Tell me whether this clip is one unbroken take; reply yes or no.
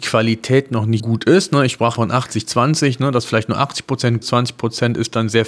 no